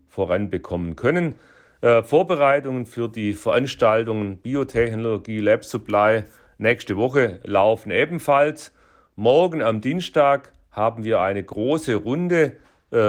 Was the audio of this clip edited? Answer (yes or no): no